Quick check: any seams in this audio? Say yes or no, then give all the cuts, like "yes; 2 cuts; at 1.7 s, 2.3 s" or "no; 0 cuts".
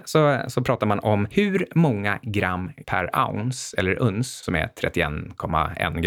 yes; 1 cut; at 2.8 s